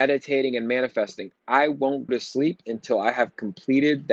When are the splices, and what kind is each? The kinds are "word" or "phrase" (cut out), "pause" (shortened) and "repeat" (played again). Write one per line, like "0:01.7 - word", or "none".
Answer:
0:02.1 - word